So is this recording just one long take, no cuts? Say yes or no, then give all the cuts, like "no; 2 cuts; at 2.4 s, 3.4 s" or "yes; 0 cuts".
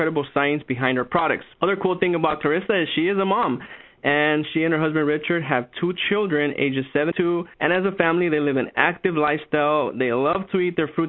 no; 3 cuts; at 1.5 s, 7.1 s, 7.5 s